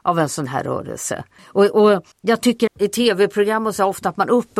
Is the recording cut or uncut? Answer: cut